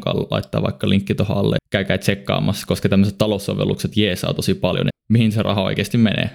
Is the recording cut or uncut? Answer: cut